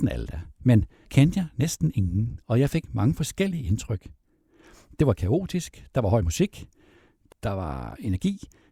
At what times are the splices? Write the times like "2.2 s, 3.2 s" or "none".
1.1 s, 7.3 s